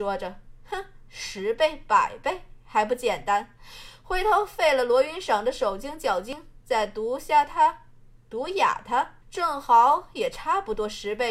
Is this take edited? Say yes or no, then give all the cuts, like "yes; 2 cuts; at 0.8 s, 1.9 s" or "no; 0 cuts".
yes; 1 cut; at 9.2 s